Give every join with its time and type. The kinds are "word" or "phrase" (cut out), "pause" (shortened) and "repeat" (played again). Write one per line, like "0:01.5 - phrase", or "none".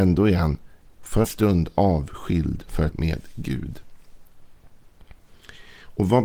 0:01.2 - word
0:02.9 - word